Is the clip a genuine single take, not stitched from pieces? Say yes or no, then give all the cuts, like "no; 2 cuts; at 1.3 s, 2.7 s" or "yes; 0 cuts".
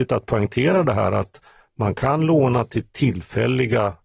yes; 0 cuts